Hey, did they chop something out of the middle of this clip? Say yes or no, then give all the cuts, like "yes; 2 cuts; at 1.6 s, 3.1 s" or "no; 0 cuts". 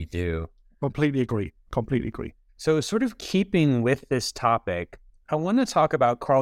yes; 2 cuts; at 2.5 s, 5.2 s